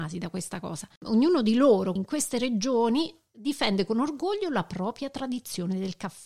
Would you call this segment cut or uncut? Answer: cut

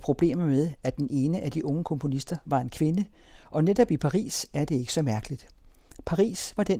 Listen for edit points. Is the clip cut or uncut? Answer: uncut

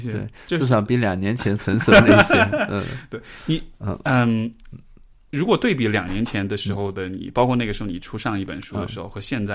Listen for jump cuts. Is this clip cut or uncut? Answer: uncut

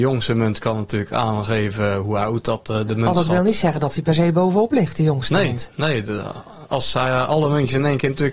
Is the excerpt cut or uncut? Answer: uncut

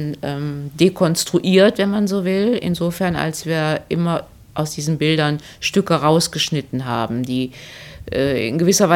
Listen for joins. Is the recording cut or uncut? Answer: uncut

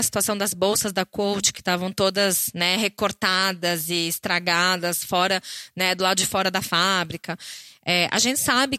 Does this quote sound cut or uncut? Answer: uncut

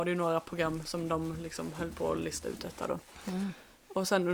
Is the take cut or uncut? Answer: uncut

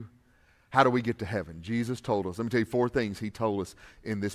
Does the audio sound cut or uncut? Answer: uncut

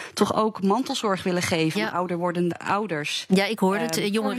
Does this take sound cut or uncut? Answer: cut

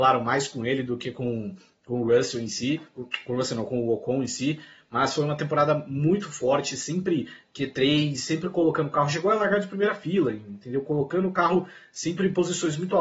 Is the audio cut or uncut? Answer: uncut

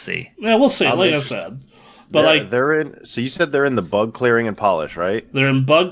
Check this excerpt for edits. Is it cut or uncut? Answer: uncut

